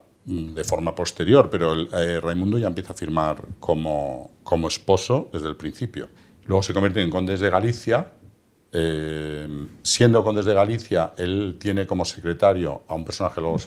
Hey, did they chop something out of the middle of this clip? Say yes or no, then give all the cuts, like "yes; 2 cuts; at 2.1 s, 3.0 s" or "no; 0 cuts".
yes; 2 cuts; at 6.2 s, 9.8 s